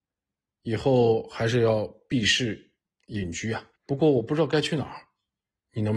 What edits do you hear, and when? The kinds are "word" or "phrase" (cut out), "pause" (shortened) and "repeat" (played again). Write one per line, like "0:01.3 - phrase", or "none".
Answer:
0:03.8 - pause